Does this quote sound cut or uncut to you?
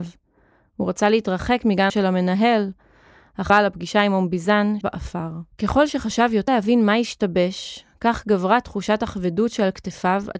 cut